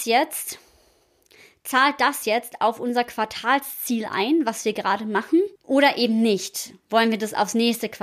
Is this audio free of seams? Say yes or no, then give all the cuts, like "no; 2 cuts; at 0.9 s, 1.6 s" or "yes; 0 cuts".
no; 1 cut; at 5.6 s